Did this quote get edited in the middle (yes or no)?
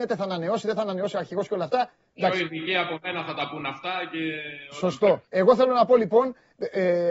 yes